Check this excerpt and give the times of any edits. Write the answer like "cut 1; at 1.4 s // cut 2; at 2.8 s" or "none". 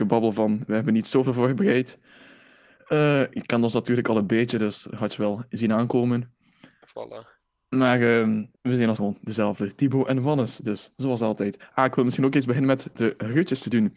cut 1; at 8.5 s // cut 2; at 9.0 s